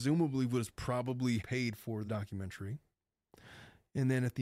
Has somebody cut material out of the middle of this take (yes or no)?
yes